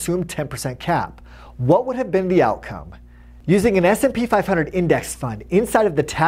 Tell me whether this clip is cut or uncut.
uncut